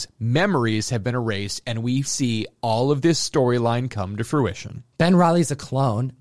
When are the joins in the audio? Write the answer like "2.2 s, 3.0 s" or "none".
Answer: 2.1 s